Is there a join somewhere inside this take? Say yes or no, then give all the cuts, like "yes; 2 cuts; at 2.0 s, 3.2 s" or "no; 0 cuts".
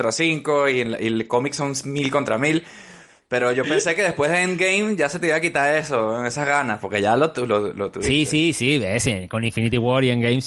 no; 0 cuts